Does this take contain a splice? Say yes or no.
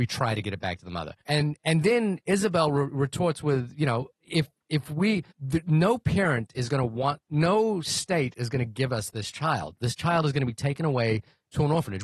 yes